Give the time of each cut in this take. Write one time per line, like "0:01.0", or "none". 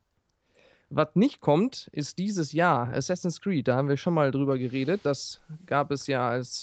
none